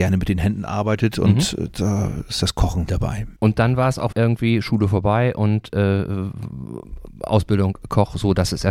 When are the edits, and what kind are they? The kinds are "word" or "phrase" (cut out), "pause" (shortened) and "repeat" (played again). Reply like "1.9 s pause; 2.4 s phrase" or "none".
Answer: 2.9 s word; 3.4 s pause; 4.1 s phrase